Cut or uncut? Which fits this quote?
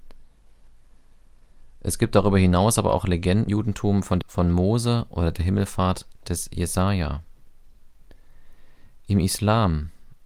cut